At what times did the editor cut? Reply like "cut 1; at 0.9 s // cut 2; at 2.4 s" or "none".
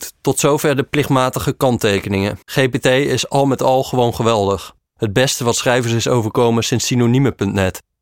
cut 1; at 2.4 s // cut 2; at 4.9 s